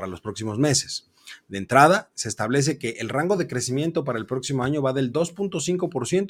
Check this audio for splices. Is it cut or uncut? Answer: uncut